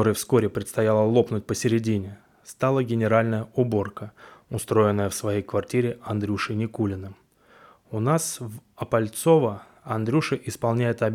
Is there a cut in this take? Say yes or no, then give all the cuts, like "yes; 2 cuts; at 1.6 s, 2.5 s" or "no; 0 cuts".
no; 0 cuts